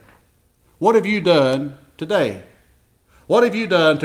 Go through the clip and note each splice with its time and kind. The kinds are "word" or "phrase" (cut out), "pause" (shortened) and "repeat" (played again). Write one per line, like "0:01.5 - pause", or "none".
none